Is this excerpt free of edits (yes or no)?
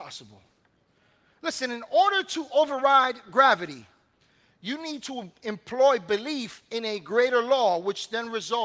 yes